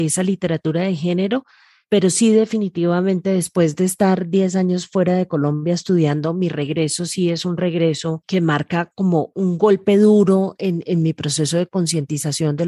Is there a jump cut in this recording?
no; 0 cuts

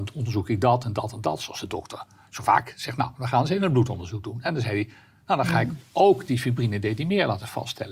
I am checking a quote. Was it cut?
no; 0 cuts

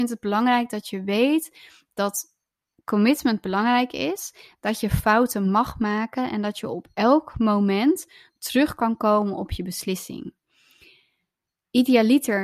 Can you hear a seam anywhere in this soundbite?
no; 0 cuts

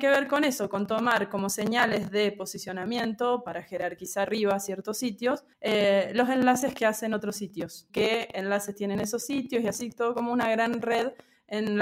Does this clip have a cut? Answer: yes; 3 cuts; at 4.2 s, 5.5 s, 7.9 s

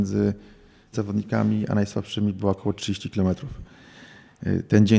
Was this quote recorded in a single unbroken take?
no; 1 cut; at 0.9 s

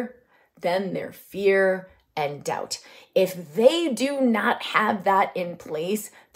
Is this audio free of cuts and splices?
yes; 0 cuts

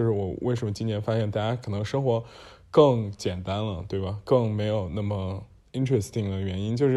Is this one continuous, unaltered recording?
yes; 0 cuts

